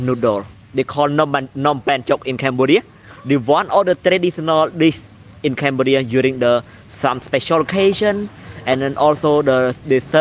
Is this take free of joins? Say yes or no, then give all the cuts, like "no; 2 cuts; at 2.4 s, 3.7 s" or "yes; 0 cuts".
yes; 0 cuts